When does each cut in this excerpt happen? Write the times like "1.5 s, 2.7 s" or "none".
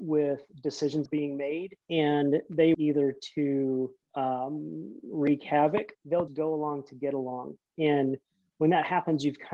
1.1 s, 1.8 s, 2.7 s, 4.0 s, 5.9 s, 6.3 s